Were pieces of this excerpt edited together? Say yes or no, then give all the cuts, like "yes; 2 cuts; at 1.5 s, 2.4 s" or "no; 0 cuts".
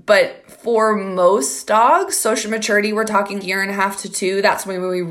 yes; 1 cut; at 3.4 s